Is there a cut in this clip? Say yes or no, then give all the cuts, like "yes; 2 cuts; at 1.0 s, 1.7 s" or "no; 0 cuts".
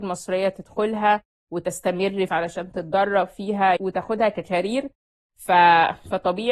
yes; 2 cuts; at 2.3 s, 3.8 s